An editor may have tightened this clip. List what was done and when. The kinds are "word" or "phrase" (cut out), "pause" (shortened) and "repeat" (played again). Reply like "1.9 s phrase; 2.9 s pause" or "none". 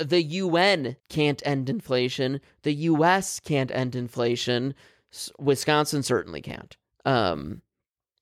1.0 s pause